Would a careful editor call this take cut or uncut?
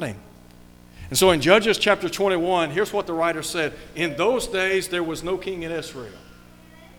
uncut